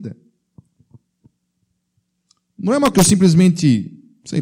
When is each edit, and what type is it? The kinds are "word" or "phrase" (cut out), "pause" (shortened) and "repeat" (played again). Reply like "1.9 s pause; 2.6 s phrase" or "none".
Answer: 2.9 s word